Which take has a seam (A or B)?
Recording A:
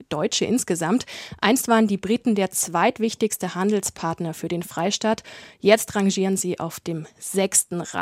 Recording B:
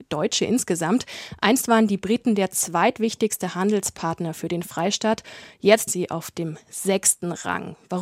B